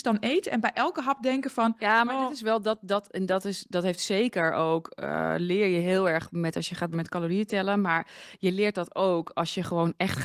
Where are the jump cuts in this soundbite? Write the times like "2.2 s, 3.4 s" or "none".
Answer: 6.9 s